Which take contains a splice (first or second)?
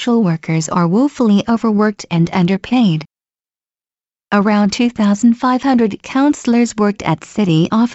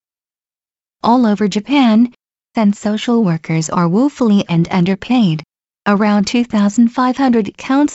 second